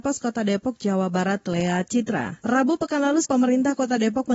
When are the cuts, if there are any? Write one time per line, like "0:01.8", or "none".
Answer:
0:03.2